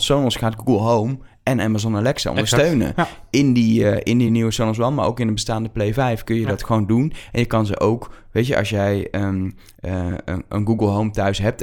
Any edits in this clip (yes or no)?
no